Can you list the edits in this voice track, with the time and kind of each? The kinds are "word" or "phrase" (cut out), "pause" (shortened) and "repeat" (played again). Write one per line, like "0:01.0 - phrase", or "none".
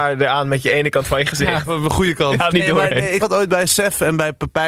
0:02.5 - phrase
0:03.2 - word